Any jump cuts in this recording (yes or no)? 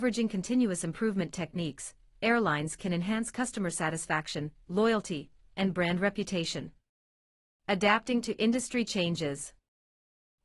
no